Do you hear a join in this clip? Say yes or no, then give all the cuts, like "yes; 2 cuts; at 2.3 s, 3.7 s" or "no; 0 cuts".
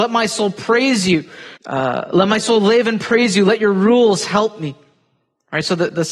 yes; 1 cut; at 1.6 s